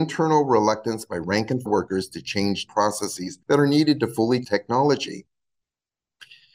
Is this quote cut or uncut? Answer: cut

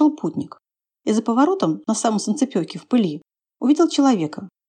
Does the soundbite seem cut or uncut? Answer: uncut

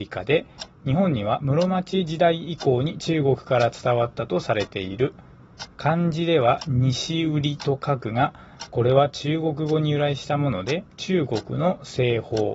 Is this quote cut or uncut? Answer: cut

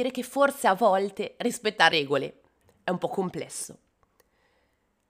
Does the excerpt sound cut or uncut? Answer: cut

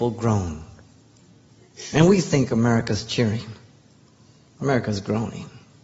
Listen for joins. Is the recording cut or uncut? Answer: uncut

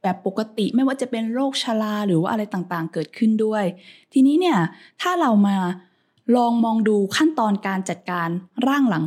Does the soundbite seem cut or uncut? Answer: uncut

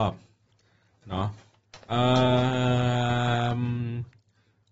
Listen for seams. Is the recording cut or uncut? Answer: uncut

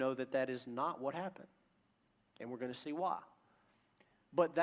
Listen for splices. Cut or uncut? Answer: uncut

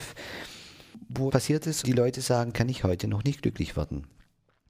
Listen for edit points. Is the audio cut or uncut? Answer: cut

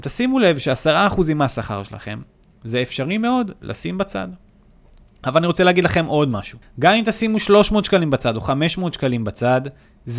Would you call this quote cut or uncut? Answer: cut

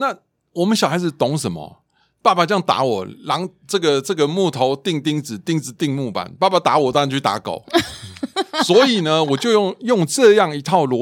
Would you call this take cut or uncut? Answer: uncut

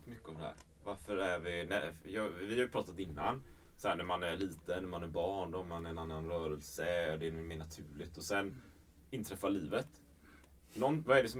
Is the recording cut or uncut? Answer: uncut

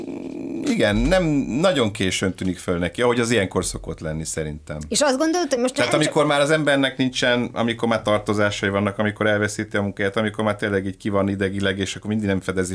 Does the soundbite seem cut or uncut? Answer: uncut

